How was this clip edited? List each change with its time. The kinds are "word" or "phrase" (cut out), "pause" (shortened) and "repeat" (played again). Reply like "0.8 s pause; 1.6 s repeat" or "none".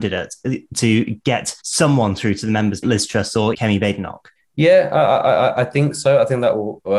1.6 s pause; 2.8 s phrase; 3.5 s word